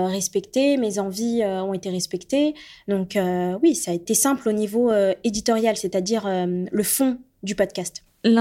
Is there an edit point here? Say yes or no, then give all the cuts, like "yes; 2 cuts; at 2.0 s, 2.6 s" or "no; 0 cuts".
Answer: no; 0 cuts